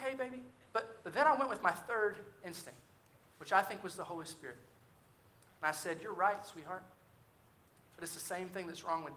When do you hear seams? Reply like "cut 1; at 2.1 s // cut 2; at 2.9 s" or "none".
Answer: none